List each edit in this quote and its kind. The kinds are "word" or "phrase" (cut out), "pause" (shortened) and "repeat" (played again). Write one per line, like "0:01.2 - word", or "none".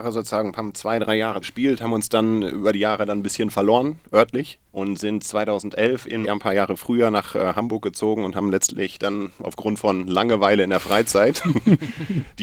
0:01.4 - word
0:04.7 - pause
0:06.2 - phrase